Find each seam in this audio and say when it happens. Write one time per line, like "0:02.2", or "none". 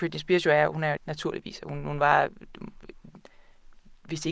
0:01.0